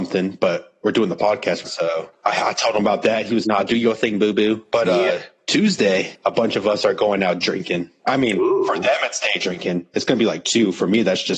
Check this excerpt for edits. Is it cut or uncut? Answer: cut